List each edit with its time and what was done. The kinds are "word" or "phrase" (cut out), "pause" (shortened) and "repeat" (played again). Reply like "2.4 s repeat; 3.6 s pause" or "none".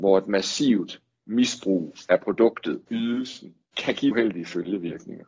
2.9 s word; 4.1 s word